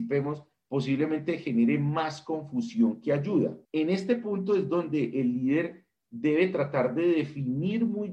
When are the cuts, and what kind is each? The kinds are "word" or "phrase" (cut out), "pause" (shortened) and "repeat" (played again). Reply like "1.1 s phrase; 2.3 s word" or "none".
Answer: 3.6 s pause

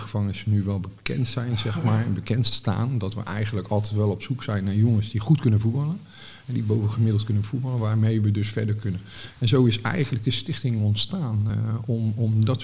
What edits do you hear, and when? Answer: none

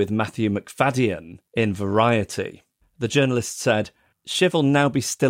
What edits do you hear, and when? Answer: none

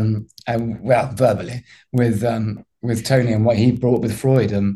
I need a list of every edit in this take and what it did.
none

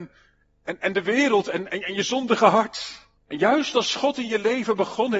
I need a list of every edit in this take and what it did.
3.2 s pause

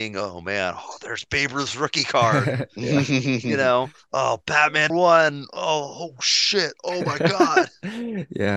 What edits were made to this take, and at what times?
4.9 s word

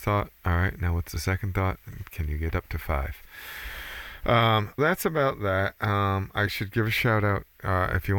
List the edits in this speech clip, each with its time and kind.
4.8 s word

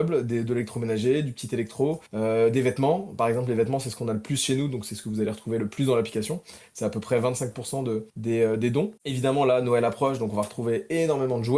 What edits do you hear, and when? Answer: 2.1 s pause; 8.1 s pause; 9.0 s pause

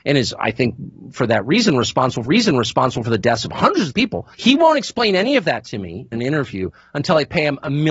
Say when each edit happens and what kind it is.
2.2 s repeat; 3.9 s phrase; 4.3 s pause; 6.1 s word

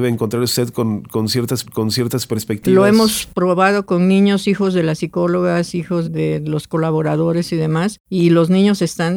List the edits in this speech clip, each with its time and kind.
1.6 s repeat; 6.0 s word; 8.0 s pause

